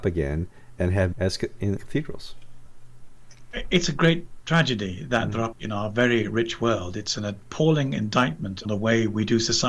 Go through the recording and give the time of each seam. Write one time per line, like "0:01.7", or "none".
0:01.1
0:01.8
0:05.5
0:08.6